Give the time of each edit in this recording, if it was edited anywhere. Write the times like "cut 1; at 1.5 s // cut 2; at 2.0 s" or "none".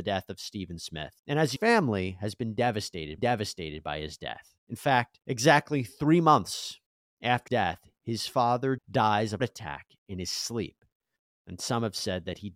cut 1; at 1.6 s // cut 2; at 3.2 s // cut 3; at 4.6 s // cut 4; at 5.2 s // cut 5; at 7.5 s // cut 6; at 8.8 s // cut 7; at 9.4 s